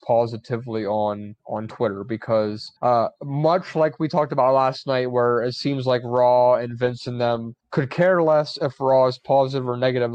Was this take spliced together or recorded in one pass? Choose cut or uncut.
cut